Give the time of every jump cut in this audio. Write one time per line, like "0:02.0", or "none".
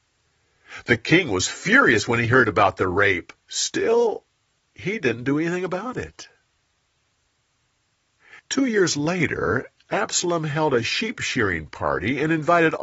0:03.4
0:08.4